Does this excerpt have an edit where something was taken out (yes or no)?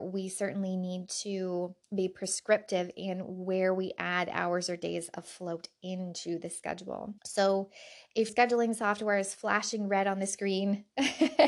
yes